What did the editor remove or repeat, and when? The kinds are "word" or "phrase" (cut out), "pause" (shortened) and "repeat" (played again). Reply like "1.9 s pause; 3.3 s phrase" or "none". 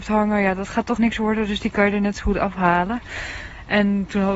1.0 s word